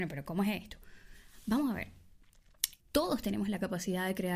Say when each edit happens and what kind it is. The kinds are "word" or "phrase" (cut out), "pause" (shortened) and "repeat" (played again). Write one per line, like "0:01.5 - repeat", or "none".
0:02.8 - pause